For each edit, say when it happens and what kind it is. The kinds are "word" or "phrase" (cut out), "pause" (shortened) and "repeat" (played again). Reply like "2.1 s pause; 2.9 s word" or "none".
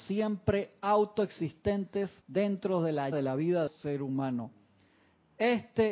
2.2 s pause; 3.1 s word; 3.7 s phrase